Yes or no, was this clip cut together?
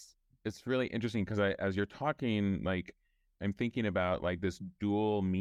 no